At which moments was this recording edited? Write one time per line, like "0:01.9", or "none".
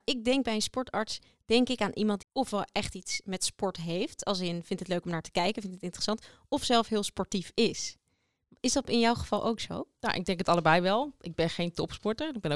0:02.2